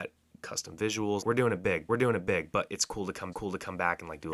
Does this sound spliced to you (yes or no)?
yes